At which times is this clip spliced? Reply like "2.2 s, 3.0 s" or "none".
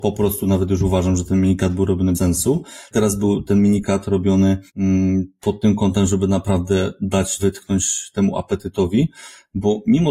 2.1 s, 2.9 s, 4.7 s, 7.4 s